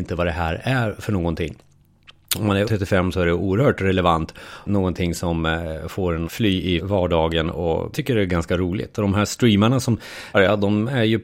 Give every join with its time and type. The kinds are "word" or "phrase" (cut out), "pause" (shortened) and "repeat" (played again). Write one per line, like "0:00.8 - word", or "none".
0:02.6 - word
0:04.6 - word
0:06.2 - word
0:06.8 - word
0:07.9 - word
0:10.3 - word